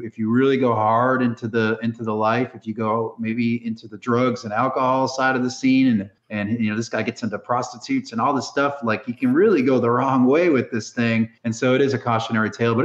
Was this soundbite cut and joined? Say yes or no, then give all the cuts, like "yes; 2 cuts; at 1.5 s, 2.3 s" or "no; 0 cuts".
yes; 2 cuts; at 6.2 s, 11.4 s